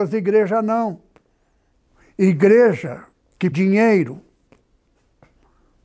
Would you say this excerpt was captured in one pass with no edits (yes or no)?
no